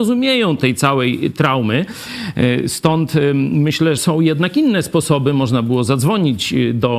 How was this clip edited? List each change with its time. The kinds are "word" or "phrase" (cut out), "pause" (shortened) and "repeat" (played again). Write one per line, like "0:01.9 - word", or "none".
0:04.0 - word